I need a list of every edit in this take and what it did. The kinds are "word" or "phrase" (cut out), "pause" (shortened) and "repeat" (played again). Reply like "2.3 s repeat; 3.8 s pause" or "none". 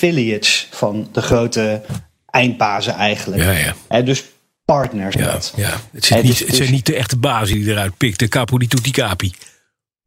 5.1 s word